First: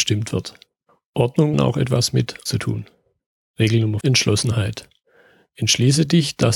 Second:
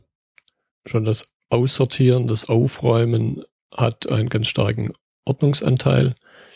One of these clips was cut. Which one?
first; 3 cuts; at 1.5 s, 2.5 s, 4.0 s

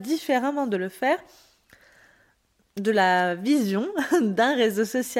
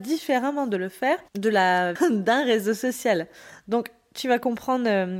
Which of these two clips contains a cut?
second; 2 cuts; at 1.3 s, 2.0 s

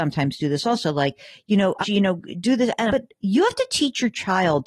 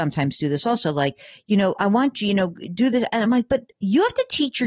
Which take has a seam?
first; 2 cuts; at 1.8 s, 2.9 s

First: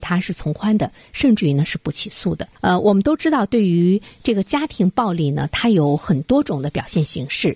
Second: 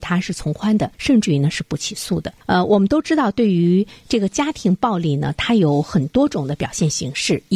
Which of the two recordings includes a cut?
second; 1 cut; at 0.9 s

